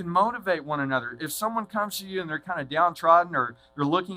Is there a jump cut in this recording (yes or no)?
no